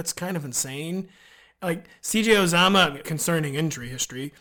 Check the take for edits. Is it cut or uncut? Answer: cut